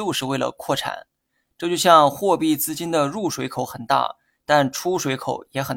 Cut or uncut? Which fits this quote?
uncut